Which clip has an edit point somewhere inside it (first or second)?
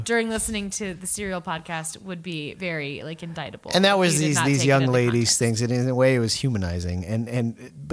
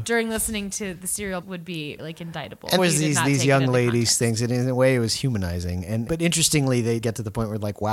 second